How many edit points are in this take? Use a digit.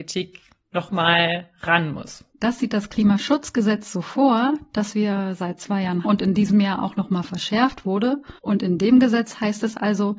3